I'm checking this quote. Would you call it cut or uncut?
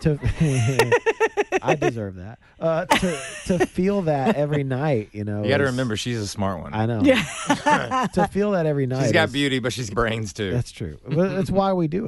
cut